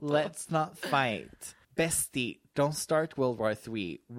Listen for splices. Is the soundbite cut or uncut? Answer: cut